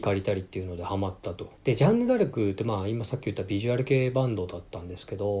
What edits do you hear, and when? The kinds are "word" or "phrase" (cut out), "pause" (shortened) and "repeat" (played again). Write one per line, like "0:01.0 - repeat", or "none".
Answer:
0:01.6 - pause